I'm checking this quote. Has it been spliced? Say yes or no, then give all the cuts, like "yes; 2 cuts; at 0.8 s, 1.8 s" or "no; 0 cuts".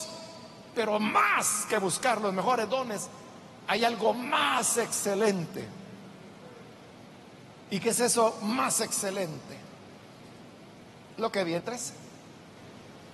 yes; 1 cut; at 11.6 s